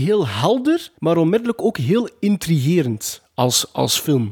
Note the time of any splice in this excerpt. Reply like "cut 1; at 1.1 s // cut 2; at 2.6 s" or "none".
cut 1; at 1.0 s